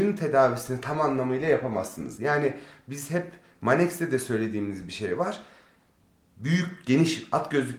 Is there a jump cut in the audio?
no; 0 cuts

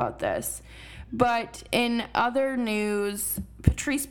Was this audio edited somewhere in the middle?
no; 0 cuts

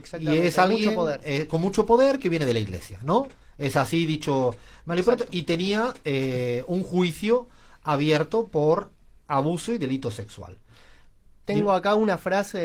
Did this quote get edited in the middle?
no; 0 cuts

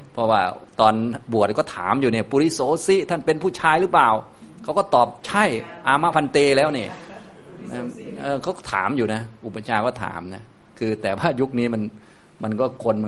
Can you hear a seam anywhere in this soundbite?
no; 0 cuts

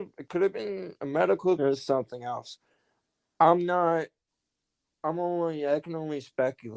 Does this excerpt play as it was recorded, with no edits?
no; 1 cut; at 1.6 s

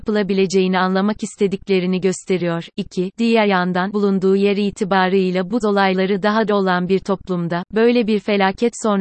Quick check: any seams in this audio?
yes; 3 cuts; at 3.9 s, 5.6 s, 6.5 s

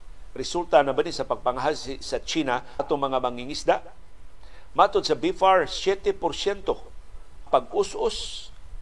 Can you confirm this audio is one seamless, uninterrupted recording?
no; 2 cuts; at 2.8 s, 7.5 s

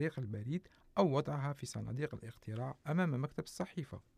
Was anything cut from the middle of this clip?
no; 0 cuts

